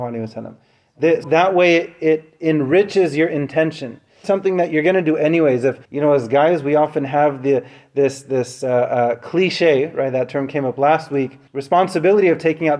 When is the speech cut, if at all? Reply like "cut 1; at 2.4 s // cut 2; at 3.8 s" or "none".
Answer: cut 1; at 1.2 s // cut 2; at 4.2 s // cut 3; at 5.8 s // cut 4; at 11.5 s